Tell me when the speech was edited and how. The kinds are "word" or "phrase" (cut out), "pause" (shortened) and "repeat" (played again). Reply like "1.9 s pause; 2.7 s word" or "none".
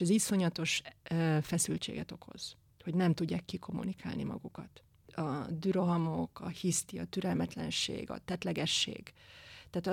none